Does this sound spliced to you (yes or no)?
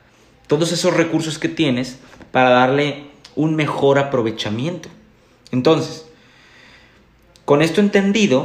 no